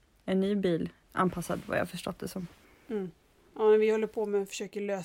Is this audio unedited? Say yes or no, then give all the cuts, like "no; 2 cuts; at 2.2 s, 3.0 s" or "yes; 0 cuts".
no; 1 cut; at 3.4 s